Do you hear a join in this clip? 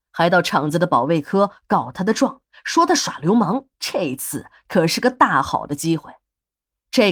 yes; 1 cut; at 3.7 s

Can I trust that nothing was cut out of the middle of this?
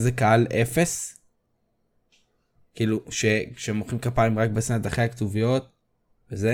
yes; 0 cuts

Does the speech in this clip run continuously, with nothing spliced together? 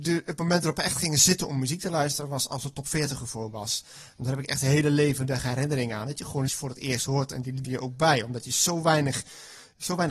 no; 2 cuts; at 6.5 s, 7.6 s

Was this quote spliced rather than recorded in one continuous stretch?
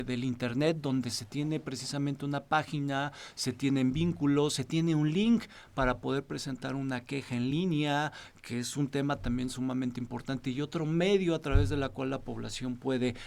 no; 0 cuts

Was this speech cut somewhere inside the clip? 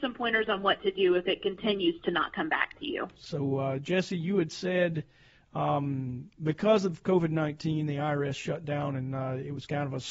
no; 0 cuts

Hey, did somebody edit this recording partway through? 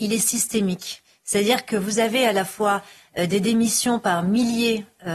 no; 0 cuts

